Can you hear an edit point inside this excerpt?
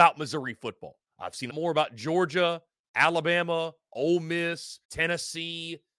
yes; 3 cuts; at 1.1 s, 1.5 s, 4.8 s

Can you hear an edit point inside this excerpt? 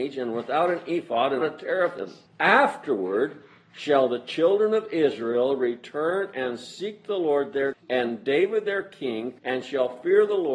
yes; 4 cuts; at 1.4 s, 2.3 s, 7.7 s, 9.4 s

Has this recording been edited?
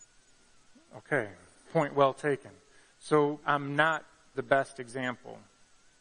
yes; 3 cuts; at 1.6 s, 3.4 s, 4.3 s

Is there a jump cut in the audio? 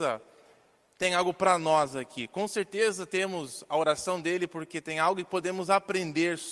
no; 0 cuts

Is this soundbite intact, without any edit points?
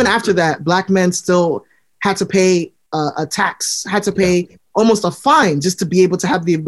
yes; 0 cuts

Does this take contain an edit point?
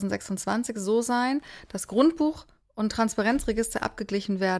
no; 0 cuts

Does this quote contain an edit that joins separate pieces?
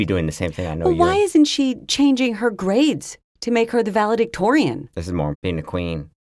yes; 1 cut; at 5.3 s

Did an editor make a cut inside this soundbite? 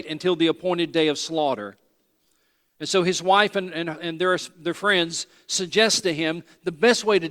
no; 0 cuts

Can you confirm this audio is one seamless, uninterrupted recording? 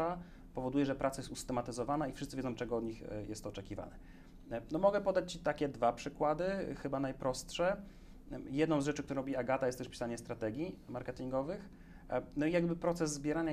yes; 0 cuts

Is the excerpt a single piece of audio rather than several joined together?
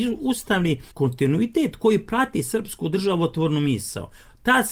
no; 1 cut; at 0.9 s

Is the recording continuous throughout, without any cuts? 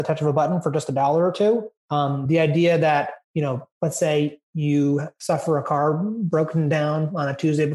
no; 2 cuts; at 1.8 s, 3.2 s

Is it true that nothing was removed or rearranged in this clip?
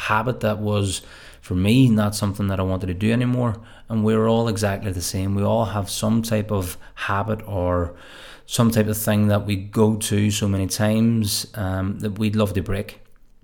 yes; 0 cuts

